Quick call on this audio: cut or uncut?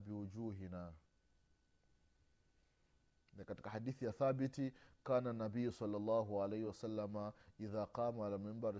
uncut